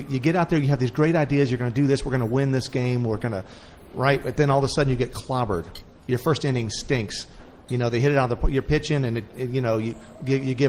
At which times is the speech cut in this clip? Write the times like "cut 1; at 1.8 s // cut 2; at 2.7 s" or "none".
none